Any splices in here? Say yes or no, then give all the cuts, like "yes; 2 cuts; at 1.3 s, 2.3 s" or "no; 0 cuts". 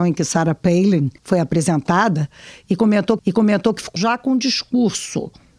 yes; 3 cuts; at 1.2 s, 3.2 s, 4.0 s